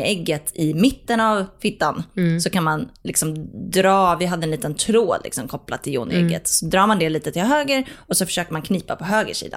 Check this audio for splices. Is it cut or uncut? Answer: uncut